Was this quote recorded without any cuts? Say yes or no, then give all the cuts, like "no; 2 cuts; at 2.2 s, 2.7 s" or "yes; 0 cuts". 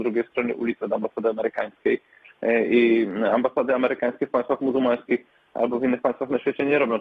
yes; 0 cuts